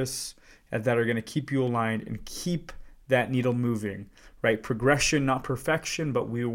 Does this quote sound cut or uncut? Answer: uncut